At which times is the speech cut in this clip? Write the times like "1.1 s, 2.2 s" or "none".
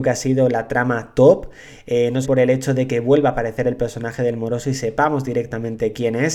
2.2 s